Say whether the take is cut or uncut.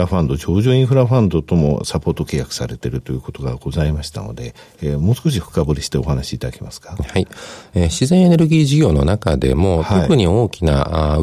uncut